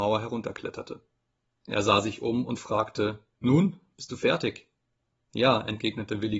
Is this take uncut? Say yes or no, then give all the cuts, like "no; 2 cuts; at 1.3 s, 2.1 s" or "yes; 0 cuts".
yes; 0 cuts